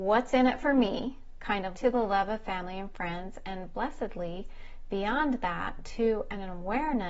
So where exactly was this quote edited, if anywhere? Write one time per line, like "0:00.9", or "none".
0:01.7